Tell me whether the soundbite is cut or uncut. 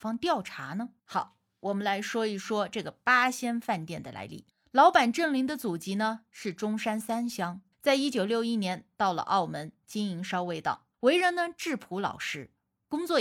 cut